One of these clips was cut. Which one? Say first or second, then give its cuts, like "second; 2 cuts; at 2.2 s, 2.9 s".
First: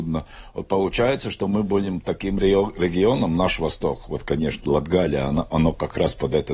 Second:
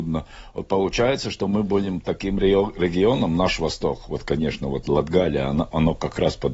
first; 1 cut; at 4.6 s